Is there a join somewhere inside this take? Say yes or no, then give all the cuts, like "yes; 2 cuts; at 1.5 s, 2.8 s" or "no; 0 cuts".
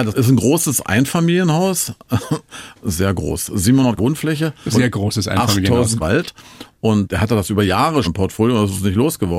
yes; 4 cuts; at 4.0 s, 4.7 s, 6.0 s, 8.0 s